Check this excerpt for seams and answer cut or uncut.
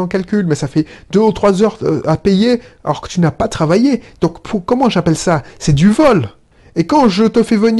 uncut